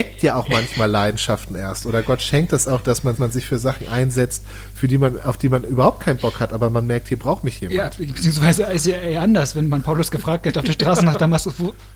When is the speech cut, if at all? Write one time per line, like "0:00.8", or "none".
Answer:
0:03.2